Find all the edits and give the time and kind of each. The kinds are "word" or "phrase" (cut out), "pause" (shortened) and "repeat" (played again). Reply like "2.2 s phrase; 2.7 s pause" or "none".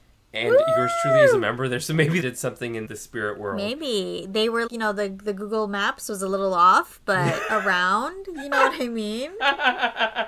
2.2 s phrase; 2.9 s word; 4.7 s word